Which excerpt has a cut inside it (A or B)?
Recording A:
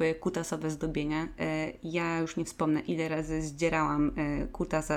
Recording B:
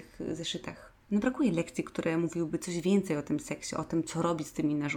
B